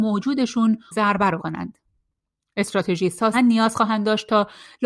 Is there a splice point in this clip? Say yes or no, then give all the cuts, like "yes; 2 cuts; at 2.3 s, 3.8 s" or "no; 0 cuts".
yes; 3 cuts; at 0.9 s, 1.4 s, 3.3 s